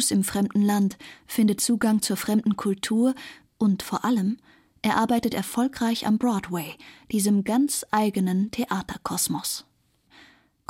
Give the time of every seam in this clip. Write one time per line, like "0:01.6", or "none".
none